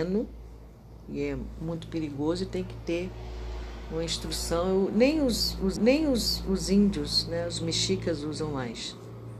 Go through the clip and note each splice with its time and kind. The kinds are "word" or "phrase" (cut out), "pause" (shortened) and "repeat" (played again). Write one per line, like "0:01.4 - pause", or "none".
0:05.8 - repeat